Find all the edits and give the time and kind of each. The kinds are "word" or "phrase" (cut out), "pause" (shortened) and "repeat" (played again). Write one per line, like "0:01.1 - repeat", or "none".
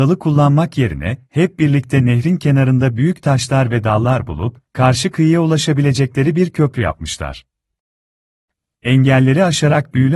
none